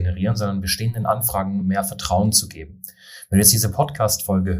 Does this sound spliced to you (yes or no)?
no